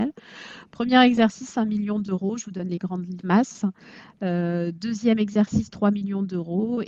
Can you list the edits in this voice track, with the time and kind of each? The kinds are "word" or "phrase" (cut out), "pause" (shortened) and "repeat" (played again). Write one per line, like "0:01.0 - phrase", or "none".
none